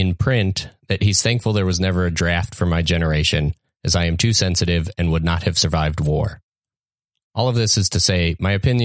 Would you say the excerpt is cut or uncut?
uncut